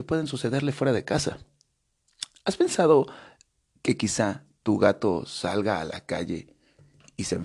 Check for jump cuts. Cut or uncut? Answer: uncut